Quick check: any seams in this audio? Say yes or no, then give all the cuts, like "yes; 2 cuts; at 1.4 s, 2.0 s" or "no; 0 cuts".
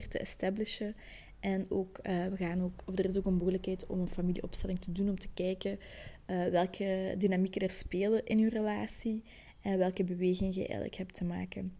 no; 0 cuts